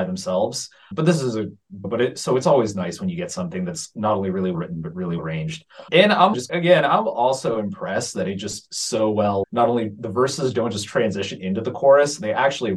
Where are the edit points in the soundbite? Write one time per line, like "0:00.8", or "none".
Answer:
0:04.5
0:05.2
0:06.3